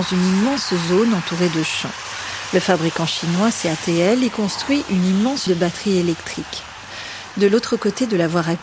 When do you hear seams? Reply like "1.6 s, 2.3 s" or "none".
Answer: 5.5 s